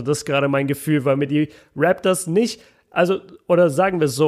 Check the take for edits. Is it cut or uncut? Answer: uncut